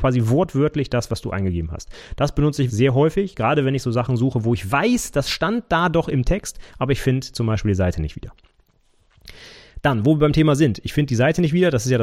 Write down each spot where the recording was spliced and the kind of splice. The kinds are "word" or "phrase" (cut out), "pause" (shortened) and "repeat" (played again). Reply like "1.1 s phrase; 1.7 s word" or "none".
2.7 s word